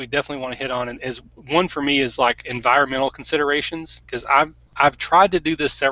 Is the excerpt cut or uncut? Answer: uncut